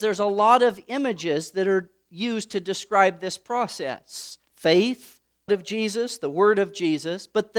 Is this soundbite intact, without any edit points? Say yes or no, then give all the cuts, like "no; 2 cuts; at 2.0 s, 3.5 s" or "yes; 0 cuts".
no; 2 cuts; at 4.5 s, 5.5 s